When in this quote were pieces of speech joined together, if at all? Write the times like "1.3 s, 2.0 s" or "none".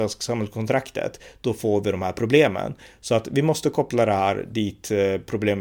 none

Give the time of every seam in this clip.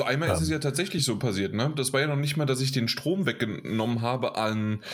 none

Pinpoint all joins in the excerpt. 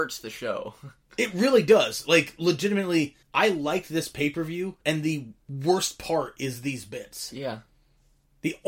3.2 s, 4.8 s

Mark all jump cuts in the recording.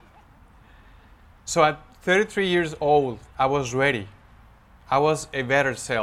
3.3 s

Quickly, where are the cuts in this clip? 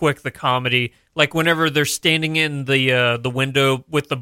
none

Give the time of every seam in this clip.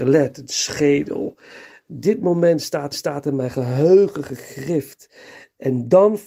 2.9 s

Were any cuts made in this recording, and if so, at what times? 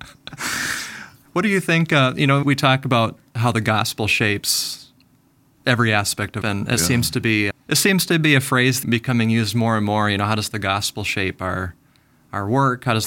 2.4 s, 6.4 s, 7.5 s, 8.8 s

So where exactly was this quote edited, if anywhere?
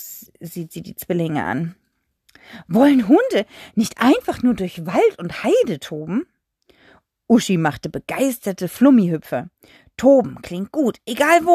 none

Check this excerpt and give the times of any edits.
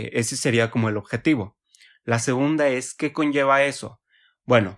none

